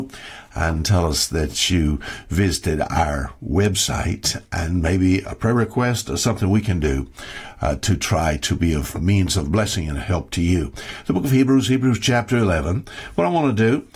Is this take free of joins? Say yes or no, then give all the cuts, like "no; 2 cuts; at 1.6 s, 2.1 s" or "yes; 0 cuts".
yes; 0 cuts